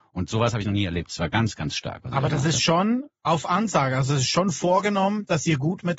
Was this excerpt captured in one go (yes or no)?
yes